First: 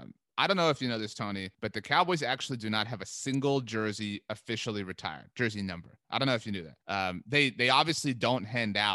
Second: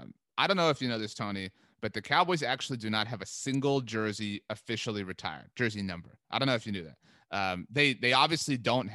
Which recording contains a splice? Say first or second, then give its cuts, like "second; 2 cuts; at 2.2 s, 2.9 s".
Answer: first; 2 cuts; at 1.5 s, 6.8 s